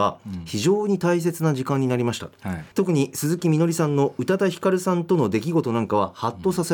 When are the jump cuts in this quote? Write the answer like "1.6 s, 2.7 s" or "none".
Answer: 2.7 s